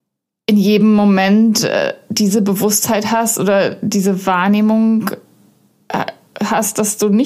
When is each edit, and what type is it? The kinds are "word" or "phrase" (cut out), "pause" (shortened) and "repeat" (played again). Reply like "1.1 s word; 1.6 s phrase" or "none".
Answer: none